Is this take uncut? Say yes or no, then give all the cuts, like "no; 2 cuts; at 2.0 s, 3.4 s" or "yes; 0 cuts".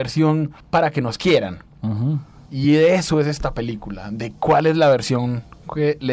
yes; 0 cuts